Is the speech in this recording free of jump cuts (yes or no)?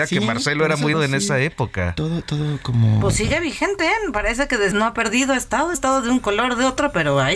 no